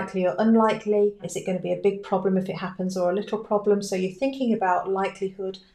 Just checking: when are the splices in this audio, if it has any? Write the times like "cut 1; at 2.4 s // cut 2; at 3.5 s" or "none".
none